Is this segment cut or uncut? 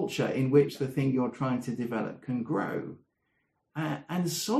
uncut